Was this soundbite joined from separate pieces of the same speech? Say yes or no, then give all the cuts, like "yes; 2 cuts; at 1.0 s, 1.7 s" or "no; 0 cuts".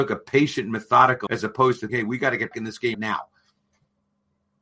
yes; 4 cuts; at 1.3 s, 1.9 s, 2.5 s, 2.9 s